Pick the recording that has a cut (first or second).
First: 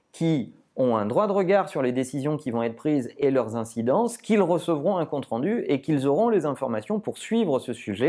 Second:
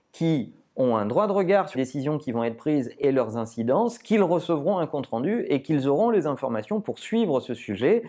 second